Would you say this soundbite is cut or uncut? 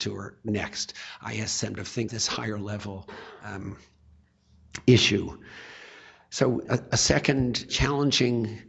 cut